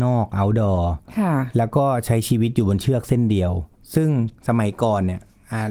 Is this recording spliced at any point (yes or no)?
yes